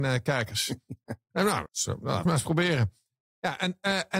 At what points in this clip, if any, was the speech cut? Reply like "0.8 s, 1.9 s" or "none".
1.7 s, 2.3 s